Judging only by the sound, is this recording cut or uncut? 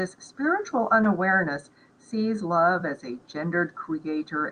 uncut